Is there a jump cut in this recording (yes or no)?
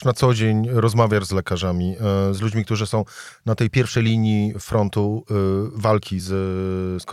no